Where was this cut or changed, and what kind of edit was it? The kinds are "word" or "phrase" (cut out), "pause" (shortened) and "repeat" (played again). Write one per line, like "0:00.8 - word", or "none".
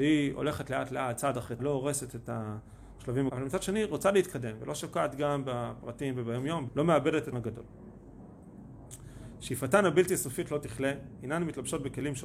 0:01.6 - word
0:03.3 - word
0:06.7 - word
0:07.3 - word